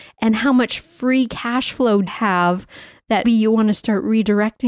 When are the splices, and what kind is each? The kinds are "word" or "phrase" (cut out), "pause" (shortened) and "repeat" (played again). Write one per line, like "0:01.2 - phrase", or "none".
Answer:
0:02.1 - word
0:03.2 - word